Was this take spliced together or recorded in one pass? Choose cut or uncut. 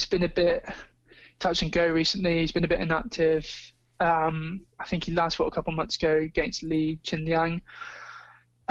uncut